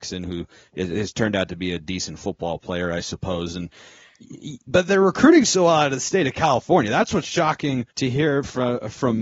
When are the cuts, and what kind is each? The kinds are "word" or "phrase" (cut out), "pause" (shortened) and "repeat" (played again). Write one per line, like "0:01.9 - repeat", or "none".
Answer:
0:07.9 - pause